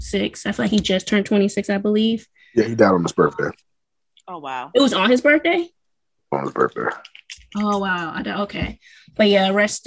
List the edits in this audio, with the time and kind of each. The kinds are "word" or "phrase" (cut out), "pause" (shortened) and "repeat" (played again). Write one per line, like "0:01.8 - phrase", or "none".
none